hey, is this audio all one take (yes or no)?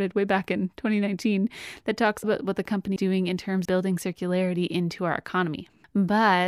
no